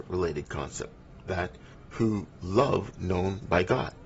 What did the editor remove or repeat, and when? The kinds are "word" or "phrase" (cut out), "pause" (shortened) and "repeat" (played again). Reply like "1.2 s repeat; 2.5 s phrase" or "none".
1.7 s word; 2.9 s word